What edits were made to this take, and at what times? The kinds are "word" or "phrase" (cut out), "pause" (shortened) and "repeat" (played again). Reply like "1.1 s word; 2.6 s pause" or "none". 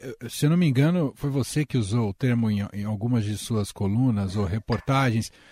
none